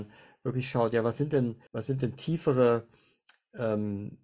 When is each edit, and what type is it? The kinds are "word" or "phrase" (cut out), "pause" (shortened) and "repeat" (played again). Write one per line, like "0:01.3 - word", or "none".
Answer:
0:01.7 - pause